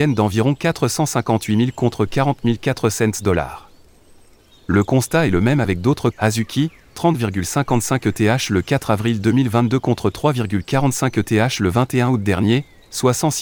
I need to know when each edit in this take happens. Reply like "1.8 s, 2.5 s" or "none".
6.1 s